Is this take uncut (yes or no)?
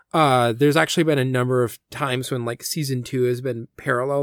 yes